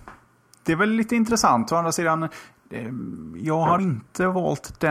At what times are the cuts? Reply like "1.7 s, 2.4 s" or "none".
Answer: 3.8 s

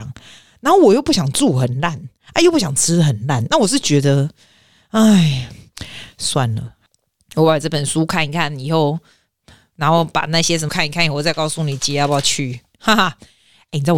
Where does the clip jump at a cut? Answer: 10.7 s

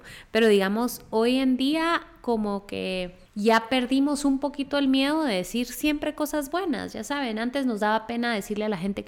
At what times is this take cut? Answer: 3.3 s

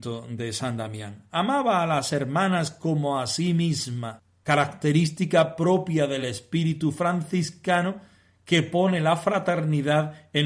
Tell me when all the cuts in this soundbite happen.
none

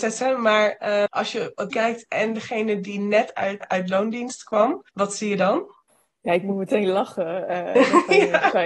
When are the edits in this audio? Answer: 1.1 s, 1.7 s, 3.6 s, 4.9 s, 5.9 s

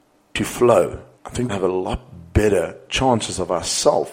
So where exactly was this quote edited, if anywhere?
1.1 s, 1.5 s

